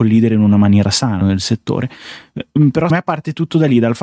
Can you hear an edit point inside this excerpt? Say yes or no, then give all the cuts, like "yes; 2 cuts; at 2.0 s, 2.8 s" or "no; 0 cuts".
yes; 2 cuts; at 1.2 s, 2.9 s